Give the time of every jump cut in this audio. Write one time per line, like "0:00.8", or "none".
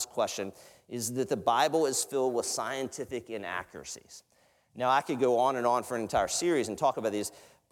none